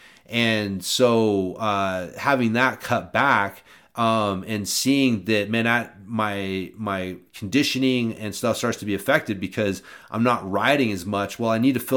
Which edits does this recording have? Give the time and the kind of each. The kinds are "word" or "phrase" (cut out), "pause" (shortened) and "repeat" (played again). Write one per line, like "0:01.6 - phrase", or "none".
none